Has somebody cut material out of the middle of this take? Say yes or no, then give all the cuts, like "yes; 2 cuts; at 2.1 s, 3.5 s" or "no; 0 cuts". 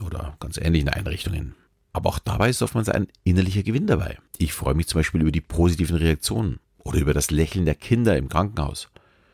yes; 3 cuts; at 1.7 s, 4.3 s, 6.6 s